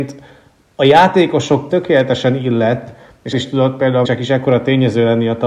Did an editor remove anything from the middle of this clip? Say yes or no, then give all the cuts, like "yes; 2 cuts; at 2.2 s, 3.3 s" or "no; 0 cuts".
yes; 3 cuts; at 1.7 s, 3.3 s, 4.0 s